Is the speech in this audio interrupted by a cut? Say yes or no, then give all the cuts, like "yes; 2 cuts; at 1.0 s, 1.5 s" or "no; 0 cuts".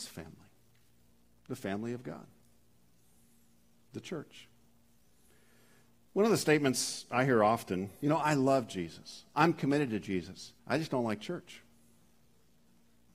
yes; 2 cuts; at 8.0 s, 10.6 s